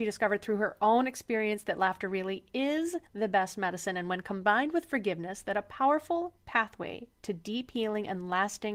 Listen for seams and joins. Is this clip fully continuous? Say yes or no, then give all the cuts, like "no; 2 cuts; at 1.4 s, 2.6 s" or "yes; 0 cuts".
no; 1 cut; at 3.1 s